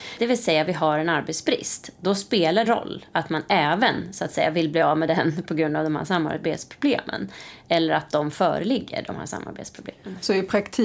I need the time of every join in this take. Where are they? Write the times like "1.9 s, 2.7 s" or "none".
2.6 s

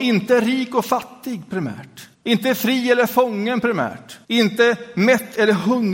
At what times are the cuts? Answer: 2.1 s, 4.2 s

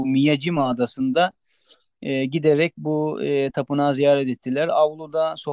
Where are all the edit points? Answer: 3.5 s

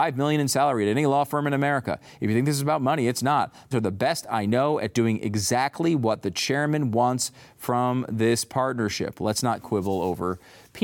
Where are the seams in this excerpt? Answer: 3.7 s

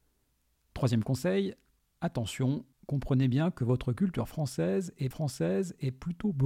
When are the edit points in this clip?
5.1 s

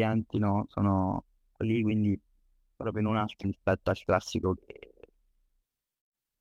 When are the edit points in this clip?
1.6 s, 2.8 s, 3.4 s, 4.6 s

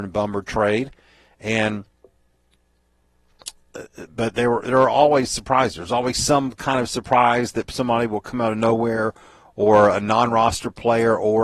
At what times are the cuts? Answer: none

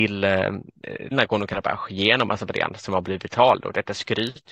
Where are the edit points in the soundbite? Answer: 1.1 s

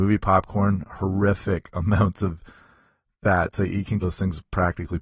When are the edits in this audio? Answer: 4.0 s

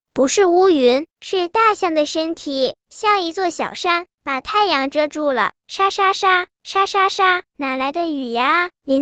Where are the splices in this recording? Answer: 5.6 s, 7.5 s

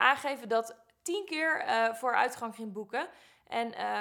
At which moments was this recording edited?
none

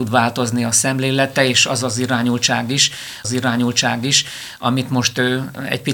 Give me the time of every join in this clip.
3.2 s

